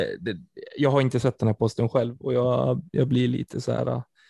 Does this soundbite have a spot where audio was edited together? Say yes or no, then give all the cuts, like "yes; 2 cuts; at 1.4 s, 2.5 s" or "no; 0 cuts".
no; 0 cuts